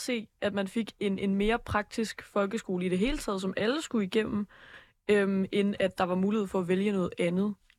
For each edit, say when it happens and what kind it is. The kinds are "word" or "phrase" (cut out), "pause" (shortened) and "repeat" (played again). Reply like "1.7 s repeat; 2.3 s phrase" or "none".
none